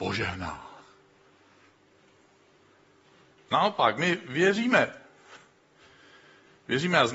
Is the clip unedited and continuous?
yes; 0 cuts

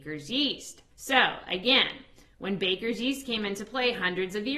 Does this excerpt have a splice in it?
yes; 1 cut; at 0.9 s

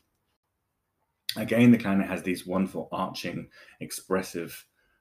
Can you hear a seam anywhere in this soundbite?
no; 0 cuts

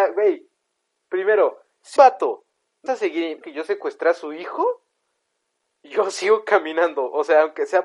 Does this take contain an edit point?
yes; 3 cuts; at 2.0 s, 2.9 s, 3.4 s

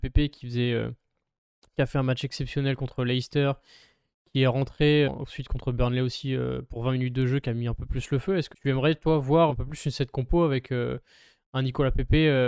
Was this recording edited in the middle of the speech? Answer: yes; 3 cuts; at 5.0 s, 8.5 s, 9.5 s

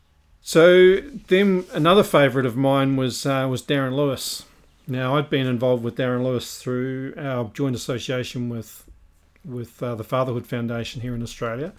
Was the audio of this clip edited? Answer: no; 0 cuts

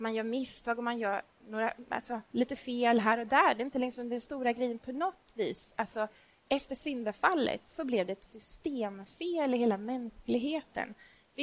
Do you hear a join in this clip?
no; 0 cuts

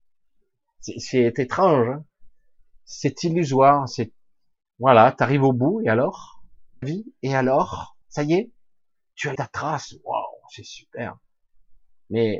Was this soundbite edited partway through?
yes; 3 cuts; at 6.8 s, 8.0 s, 9.4 s

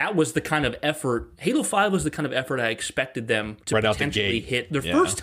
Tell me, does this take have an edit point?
yes; 1 cut; at 3.6 s

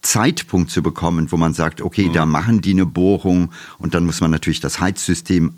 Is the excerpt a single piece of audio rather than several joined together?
yes; 0 cuts

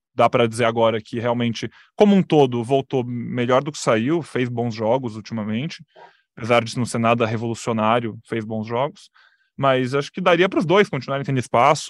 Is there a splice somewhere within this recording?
no; 0 cuts

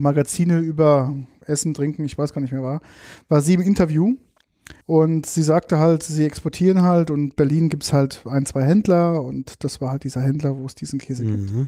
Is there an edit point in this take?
yes; 1 cut; at 4.8 s

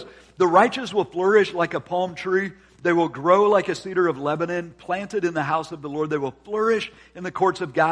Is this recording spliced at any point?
no; 0 cuts

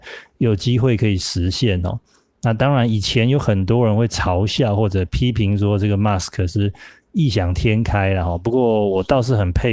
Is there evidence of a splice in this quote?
no; 0 cuts

